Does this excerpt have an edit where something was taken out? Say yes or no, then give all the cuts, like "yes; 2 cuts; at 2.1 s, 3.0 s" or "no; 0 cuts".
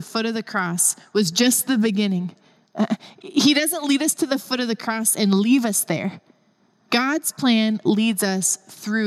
no; 0 cuts